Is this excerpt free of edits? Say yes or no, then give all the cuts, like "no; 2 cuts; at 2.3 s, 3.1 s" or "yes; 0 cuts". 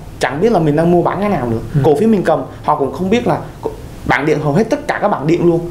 yes; 0 cuts